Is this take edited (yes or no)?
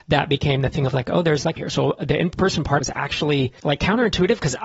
yes